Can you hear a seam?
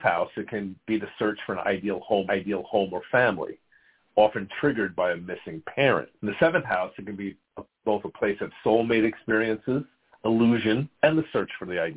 yes; 3 cuts; at 2.3 s, 6.2 s, 10.9 s

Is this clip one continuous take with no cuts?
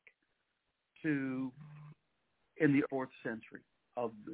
no; 1 cut; at 2.9 s

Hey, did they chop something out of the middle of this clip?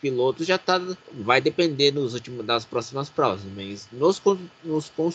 yes; 1 cut; at 1.0 s

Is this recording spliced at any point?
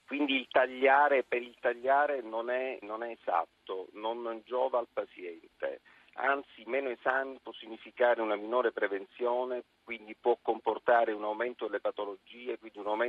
yes; 1 cut; at 2.8 s

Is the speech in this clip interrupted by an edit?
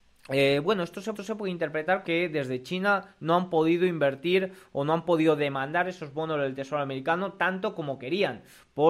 yes; 2 cuts; at 1.1 s, 2.0 s

